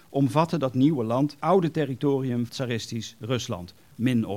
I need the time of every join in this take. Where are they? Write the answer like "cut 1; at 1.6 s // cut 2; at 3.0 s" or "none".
cut 1; at 1.4 s // cut 2; at 2.5 s